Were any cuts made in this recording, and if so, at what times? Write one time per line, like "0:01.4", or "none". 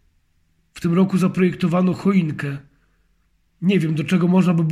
none